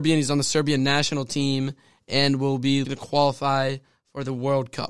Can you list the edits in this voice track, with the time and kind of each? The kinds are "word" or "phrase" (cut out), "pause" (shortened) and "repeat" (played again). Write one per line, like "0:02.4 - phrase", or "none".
0:02.8 - word